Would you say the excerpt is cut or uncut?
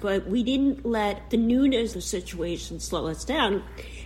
cut